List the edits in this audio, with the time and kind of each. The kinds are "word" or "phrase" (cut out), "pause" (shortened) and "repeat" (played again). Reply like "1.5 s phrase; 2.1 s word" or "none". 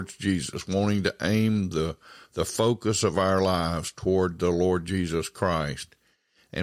none